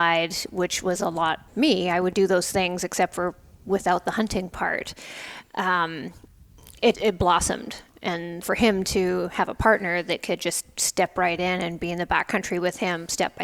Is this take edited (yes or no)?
yes